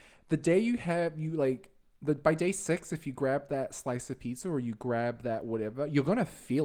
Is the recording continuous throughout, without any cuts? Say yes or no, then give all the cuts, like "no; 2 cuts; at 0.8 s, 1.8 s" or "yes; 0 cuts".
yes; 0 cuts